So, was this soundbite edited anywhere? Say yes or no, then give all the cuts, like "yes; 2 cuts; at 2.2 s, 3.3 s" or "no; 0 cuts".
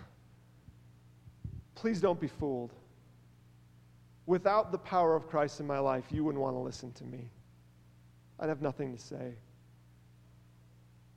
no; 0 cuts